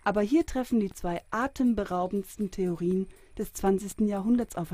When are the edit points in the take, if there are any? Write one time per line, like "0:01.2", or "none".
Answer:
none